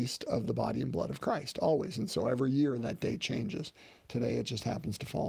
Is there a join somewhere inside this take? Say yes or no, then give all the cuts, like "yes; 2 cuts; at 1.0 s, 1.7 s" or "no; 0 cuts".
no; 0 cuts